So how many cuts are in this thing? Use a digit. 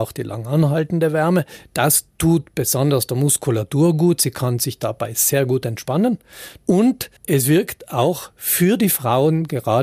1